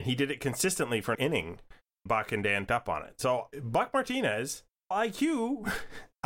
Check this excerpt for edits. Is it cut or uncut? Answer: cut